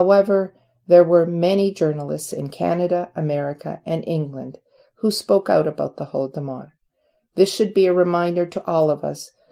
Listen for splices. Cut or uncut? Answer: uncut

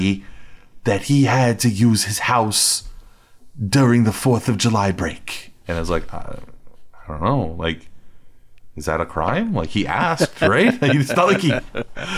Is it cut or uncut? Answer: cut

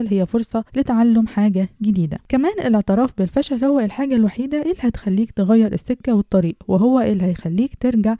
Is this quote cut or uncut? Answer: uncut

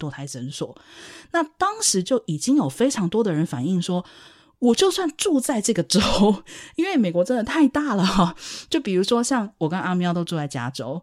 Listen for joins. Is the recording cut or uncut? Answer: uncut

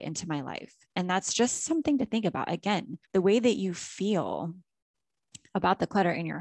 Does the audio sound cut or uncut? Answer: cut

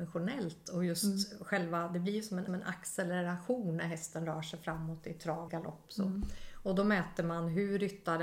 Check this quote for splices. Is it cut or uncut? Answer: cut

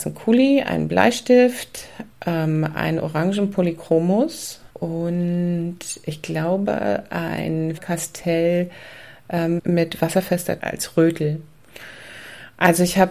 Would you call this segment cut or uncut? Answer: cut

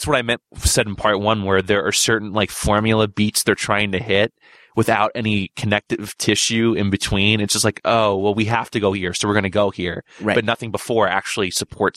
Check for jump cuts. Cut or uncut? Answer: uncut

